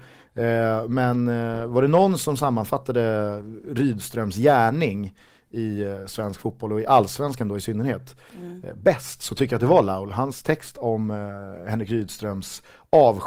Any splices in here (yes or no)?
no